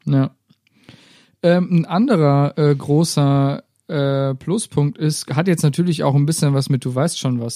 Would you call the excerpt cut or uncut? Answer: uncut